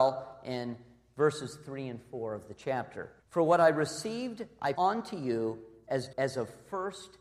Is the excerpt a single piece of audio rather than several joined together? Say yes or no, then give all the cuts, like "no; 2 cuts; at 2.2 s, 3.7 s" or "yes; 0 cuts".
no; 3 cuts; at 3.2 s, 4.8 s, 6.1 s